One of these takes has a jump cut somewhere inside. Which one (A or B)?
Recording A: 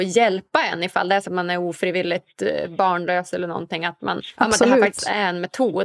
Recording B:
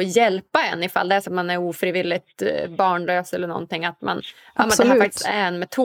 A